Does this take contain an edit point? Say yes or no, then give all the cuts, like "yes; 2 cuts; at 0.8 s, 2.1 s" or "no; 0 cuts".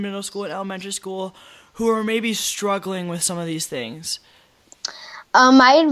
no; 0 cuts